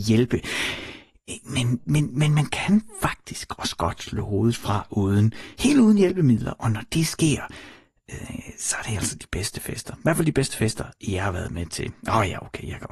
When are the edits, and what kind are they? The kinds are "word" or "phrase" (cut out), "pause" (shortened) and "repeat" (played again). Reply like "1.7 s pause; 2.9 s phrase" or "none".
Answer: 1.8 s word